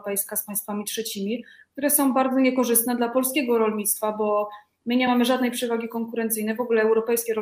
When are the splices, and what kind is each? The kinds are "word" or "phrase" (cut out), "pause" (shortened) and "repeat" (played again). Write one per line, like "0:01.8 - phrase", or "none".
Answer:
none

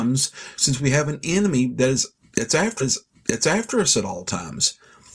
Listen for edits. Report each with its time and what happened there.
0:02.8 - repeat

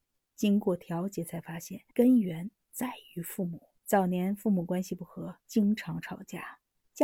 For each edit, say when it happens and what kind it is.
0:01.9 - pause
0:03.8 - pause
0:05.4 - pause

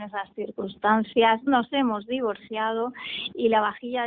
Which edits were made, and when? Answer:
0:01.5 - word

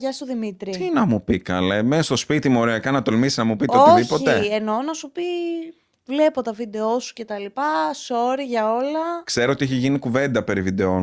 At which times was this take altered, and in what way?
none

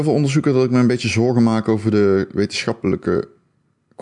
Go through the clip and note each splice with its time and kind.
none

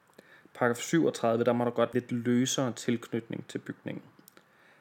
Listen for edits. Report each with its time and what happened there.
0:01.9 - phrase

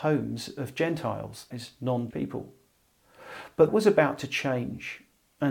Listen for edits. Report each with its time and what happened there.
0:01.5 - word
0:02.1 - word
0:03.7 - word

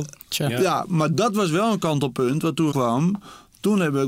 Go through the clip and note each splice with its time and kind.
0:02.7 - word

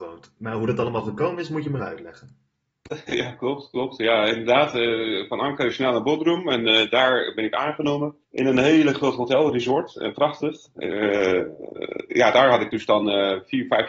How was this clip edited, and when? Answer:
0:01.8 - word
0:08.2 - pause

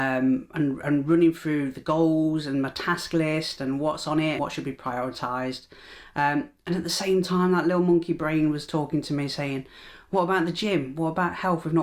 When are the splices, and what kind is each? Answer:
0:04.4 - word

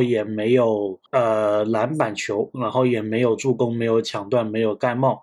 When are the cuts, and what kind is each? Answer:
0:01.1 - pause

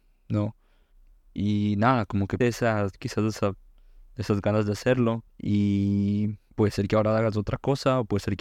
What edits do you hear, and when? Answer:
0:02.4 - word
0:05.3 - pause

